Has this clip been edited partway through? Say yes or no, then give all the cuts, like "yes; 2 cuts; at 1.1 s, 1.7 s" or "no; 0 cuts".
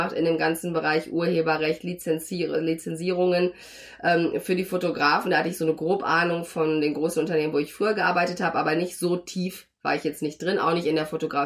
no; 0 cuts